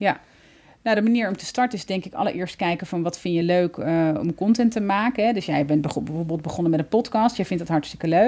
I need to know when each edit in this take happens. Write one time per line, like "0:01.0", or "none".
none